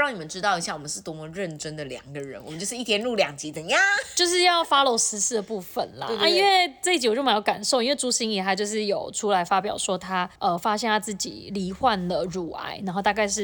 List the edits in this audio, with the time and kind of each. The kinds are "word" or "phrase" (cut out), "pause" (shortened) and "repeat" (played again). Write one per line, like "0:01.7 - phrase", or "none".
0:10.4 - pause